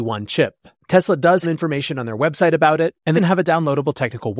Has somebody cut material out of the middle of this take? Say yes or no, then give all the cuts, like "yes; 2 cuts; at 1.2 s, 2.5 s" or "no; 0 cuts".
yes; 2 cuts; at 1.4 s, 3.2 s